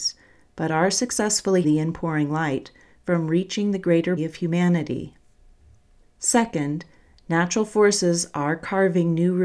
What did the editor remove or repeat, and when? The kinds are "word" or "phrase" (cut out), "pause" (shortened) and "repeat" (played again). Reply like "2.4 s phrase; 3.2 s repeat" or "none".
1.6 s word; 4.2 s word